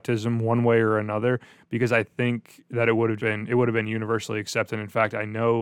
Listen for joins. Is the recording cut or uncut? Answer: cut